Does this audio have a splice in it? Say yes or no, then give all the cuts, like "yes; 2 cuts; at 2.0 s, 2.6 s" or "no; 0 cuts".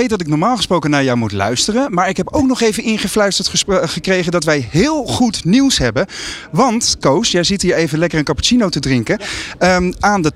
no; 0 cuts